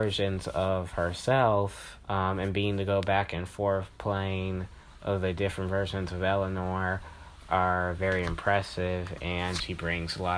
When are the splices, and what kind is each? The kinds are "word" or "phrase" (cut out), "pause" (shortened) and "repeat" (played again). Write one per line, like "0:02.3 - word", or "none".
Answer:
0:02.0 - pause